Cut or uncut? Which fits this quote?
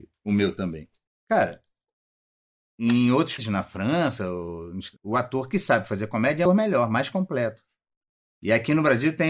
cut